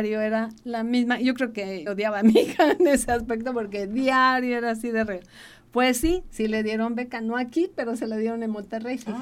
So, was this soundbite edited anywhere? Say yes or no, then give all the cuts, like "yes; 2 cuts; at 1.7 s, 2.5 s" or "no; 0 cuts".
yes; 1 cut; at 1.9 s